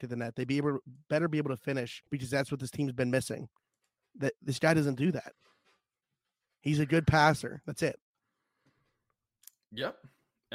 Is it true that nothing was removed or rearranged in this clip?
no; 1 cut; at 2.1 s

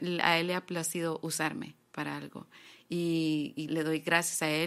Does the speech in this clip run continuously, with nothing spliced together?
no; 1 cut; at 3.7 s

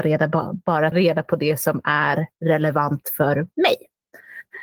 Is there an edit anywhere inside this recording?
yes; 1 cut; at 0.9 s

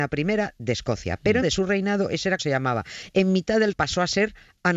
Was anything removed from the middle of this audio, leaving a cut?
yes; 3 cuts; at 1.4 s, 2.4 s, 3.7 s

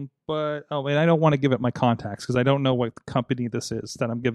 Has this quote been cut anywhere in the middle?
no; 0 cuts

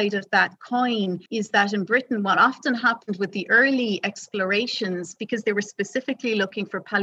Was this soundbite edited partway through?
yes; 1 cut; at 1.3 s

